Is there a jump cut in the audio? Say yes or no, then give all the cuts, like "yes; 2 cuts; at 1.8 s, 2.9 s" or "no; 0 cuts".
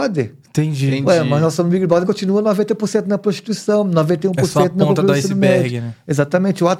yes; 1 cut; at 2.0 s